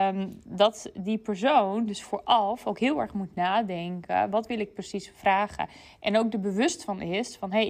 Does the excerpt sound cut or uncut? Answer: uncut